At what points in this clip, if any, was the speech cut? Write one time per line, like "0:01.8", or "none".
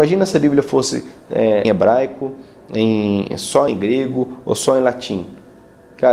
0:01.6
0:03.7